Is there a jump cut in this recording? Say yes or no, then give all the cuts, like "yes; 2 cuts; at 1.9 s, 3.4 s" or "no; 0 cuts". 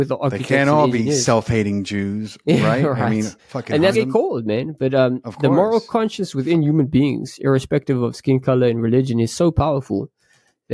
yes; 2 cuts; at 3.4 s, 3.9 s